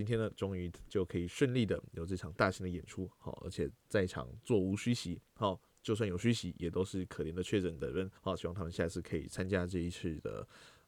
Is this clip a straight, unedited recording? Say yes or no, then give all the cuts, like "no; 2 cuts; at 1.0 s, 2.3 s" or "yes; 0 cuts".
no; 2 cuts; at 3.8 s, 8.2 s